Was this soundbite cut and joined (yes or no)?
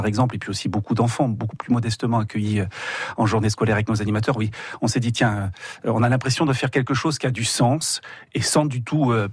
no